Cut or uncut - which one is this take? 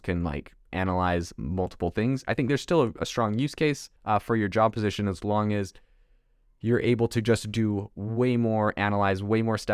cut